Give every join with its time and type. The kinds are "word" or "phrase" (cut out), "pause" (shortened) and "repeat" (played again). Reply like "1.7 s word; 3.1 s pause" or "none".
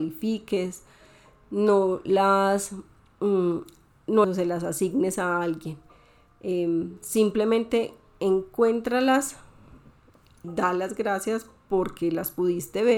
4.2 s phrase; 10.4 s word